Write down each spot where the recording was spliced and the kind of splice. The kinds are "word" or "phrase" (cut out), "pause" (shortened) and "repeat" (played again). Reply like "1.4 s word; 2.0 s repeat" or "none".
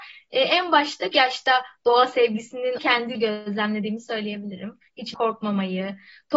1.1 s word; 2.8 s word; 3.1 s word; 5.1 s word